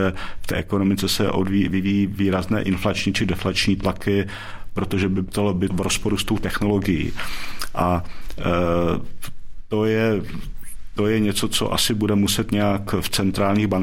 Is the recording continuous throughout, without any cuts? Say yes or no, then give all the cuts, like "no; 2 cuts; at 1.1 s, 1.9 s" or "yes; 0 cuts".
no; 1 cut; at 5.7 s